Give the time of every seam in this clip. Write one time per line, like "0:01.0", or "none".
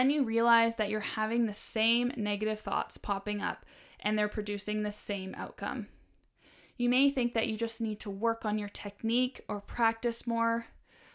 none